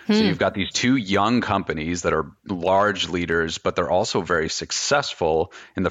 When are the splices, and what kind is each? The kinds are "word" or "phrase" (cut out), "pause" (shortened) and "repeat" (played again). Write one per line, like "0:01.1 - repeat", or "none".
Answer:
0:02.4 - pause